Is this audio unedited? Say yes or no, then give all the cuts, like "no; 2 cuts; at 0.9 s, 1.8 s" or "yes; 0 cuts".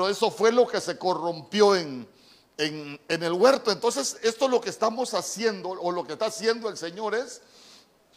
yes; 0 cuts